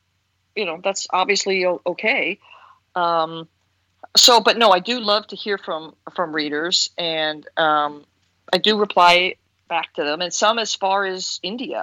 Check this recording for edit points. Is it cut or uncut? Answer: uncut